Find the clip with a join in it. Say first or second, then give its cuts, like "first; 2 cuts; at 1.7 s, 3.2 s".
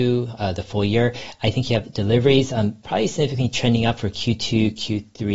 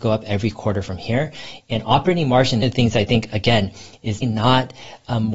second; 2 cuts; at 2.6 s, 4.2 s